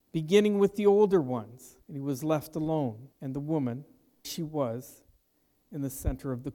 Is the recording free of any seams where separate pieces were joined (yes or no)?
no